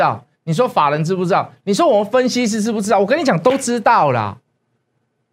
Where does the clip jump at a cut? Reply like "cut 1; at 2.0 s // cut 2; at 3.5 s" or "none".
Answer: none